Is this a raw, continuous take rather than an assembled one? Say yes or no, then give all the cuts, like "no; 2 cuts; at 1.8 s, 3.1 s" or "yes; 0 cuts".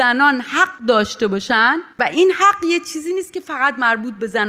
no; 1 cut; at 1.9 s